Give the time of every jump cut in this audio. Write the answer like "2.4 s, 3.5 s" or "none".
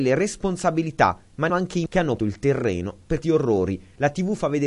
1.5 s, 1.9 s, 2.2 s, 3.2 s